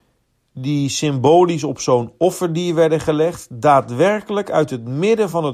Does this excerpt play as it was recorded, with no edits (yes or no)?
yes